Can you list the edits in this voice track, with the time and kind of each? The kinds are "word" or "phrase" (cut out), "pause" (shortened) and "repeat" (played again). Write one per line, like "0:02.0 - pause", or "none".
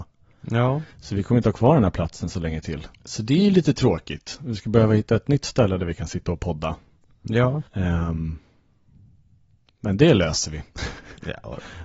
0:00.9 - pause
0:02.9 - pause
0:07.7 - pause